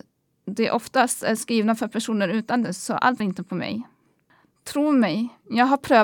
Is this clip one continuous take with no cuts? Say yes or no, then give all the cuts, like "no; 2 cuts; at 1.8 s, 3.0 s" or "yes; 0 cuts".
no; 2 cuts; at 2.6 s, 3.2 s